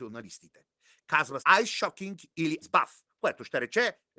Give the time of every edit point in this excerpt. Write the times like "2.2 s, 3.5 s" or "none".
1.4 s, 2.6 s